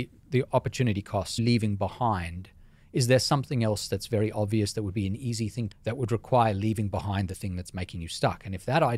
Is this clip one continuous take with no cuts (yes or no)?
no